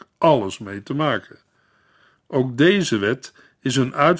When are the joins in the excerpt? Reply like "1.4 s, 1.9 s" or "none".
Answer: none